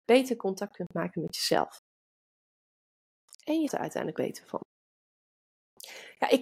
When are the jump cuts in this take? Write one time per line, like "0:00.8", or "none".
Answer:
0:03.7
0:04.1